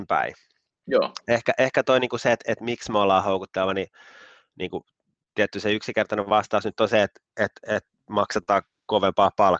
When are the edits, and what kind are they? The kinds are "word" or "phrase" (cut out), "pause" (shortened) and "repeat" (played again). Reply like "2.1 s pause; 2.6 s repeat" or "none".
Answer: none